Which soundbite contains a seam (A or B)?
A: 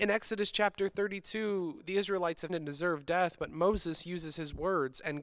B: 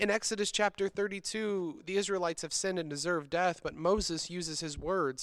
A